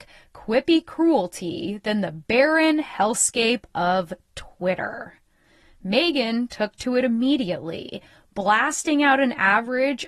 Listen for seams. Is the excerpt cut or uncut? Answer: uncut